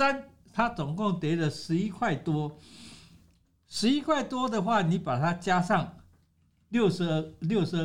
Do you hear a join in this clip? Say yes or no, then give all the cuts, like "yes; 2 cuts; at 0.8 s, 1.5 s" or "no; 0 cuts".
no; 0 cuts